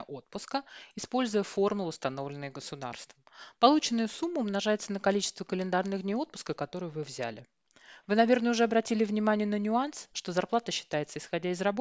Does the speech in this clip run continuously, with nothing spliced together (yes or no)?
yes